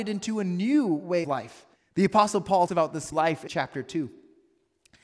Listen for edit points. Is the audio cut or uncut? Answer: cut